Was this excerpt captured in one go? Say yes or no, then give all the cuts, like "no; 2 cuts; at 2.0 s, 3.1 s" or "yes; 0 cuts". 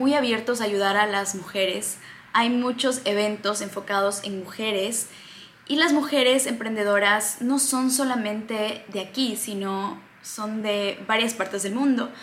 yes; 0 cuts